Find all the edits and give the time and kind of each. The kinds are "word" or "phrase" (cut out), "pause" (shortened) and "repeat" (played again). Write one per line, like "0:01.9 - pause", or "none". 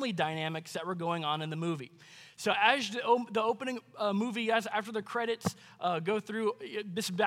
none